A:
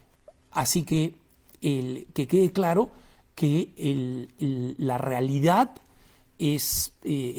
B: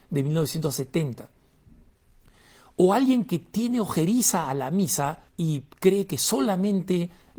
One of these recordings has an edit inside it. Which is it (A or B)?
B